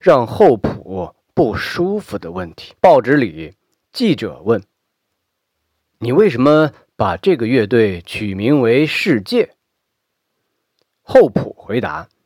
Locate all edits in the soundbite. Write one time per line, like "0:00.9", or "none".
0:02.8